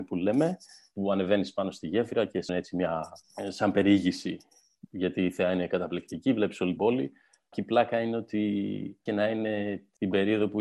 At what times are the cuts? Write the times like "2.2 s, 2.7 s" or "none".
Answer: 2.5 s, 6.8 s, 9.1 s